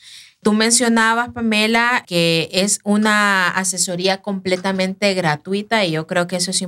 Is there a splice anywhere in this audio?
no; 0 cuts

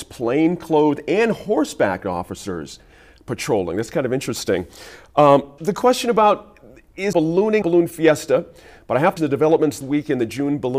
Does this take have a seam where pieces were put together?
yes; 5 cuts; at 5.6 s, 7.1 s, 7.6 s, 9.2 s, 9.8 s

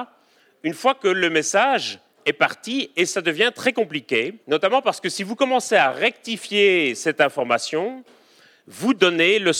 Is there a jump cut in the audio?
yes; 2 cuts; at 2.1 s, 4.4 s

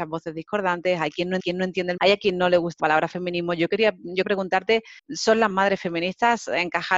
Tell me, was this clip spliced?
yes; 6 cuts; at 1.4 s, 2.0 s, 2.8 s, 4.2 s, 5.0 s, 5.5 s

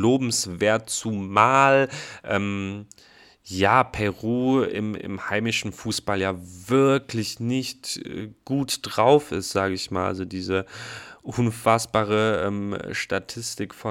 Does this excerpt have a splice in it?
no; 0 cuts

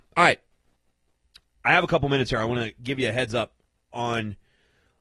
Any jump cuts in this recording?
no; 0 cuts

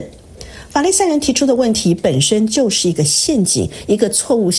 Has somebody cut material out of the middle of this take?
no; 0 cuts

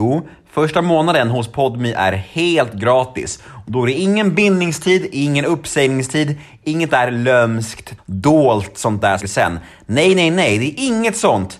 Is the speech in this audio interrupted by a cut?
yes; 3 cuts; at 6.9 s, 8.0 s, 9.2 s

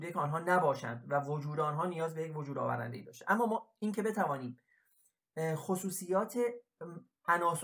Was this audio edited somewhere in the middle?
no; 0 cuts

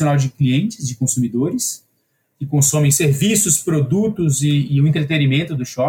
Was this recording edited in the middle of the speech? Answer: no; 0 cuts

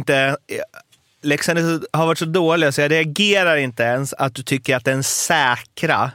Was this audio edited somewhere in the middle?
no; 0 cuts

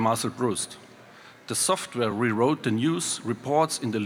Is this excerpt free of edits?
yes; 0 cuts

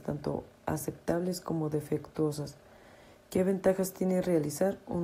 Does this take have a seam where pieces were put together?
no; 0 cuts

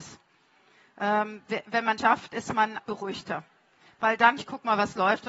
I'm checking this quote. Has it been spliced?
yes; 3 cuts; at 2.0 s, 2.8 s, 4.4 s

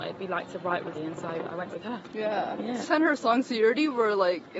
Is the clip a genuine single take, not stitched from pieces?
no; 3 cuts; at 0.9 s, 1.7 s, 2.8 s

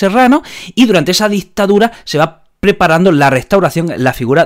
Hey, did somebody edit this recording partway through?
no; 0 cuts

